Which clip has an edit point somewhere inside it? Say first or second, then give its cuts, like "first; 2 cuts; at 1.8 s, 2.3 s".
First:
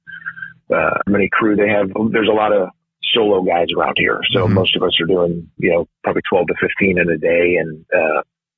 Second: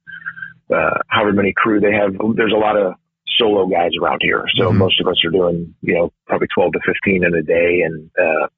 first; 1 cut; at 1.1 s